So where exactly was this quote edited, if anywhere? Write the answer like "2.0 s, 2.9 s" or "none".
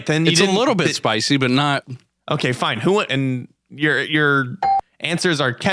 2.2 s, 3.1 s